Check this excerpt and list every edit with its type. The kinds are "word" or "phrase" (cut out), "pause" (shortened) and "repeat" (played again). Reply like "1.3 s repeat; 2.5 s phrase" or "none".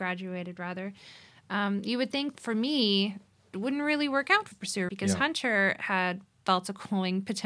2.3 s word; 3.5 s word; 4.5 s word; 4.9 s word